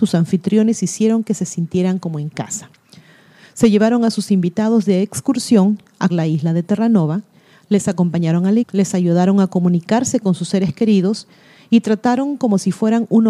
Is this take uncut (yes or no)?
no